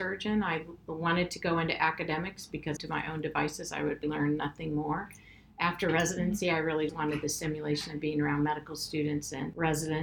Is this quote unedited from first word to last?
no; 3 cuts; at 2.8 s, 4.0 s, 6.9 s

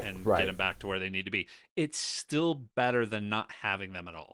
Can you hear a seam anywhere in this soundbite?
no; 0 cuts

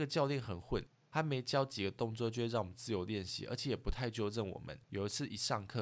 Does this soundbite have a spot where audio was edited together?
yes; 1 cut; at 4.8 s

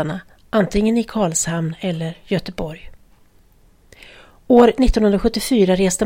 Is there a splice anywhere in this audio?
no; 0 cuts

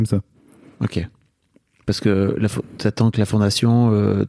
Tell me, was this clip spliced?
no; 0 cuts

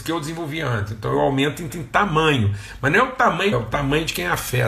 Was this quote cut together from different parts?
yes; 2 cuts; at 1.7 s, 3.5 s

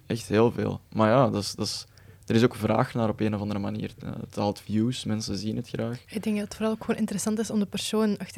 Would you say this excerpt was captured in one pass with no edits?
yes; 0 cuts

